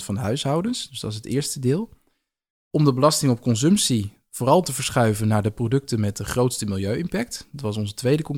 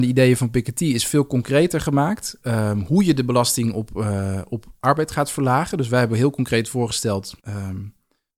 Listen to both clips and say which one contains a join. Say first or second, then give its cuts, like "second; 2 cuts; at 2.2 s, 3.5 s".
second; 1 cut; at 7.4 s